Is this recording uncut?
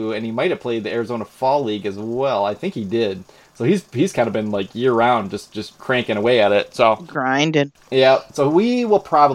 yes; 0 cuts

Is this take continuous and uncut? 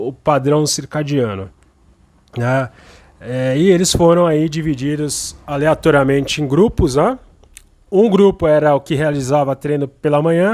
yes; 0 cuts

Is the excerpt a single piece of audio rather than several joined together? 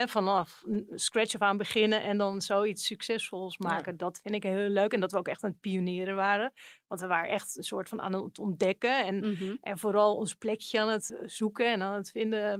yes; 0 cuts

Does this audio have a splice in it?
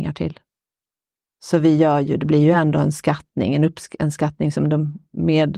no; 0 cuts

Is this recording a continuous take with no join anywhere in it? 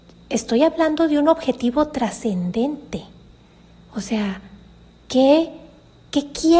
yes; 0 cuts

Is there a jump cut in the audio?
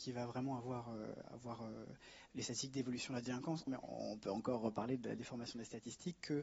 yes; 1 cut; at 3.7 s

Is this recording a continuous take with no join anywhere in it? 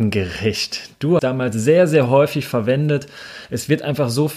no; 1 cut; at 1.2 s

